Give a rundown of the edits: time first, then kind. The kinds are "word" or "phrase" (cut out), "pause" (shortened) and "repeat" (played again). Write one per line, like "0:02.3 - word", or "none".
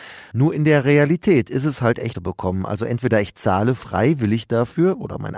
0:02.1 - phrase